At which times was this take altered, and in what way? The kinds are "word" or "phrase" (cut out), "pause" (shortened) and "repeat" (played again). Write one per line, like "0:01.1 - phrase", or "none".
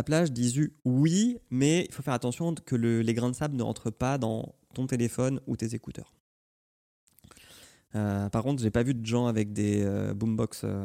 none